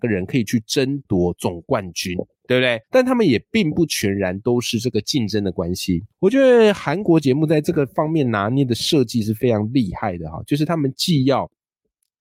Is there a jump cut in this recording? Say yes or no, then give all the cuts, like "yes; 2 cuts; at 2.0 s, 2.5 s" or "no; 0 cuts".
yes; 2 cuts; at 2.8 s, 6.1 s